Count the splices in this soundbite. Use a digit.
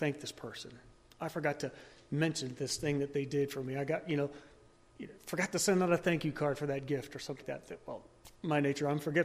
1